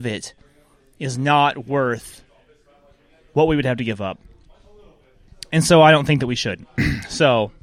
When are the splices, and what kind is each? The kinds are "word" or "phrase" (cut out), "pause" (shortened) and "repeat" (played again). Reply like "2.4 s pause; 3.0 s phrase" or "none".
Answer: none